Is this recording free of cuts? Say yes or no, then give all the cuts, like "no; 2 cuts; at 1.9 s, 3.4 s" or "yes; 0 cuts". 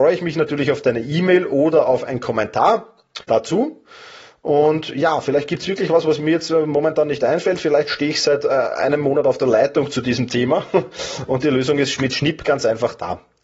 no; 1 cut; at 3.2 s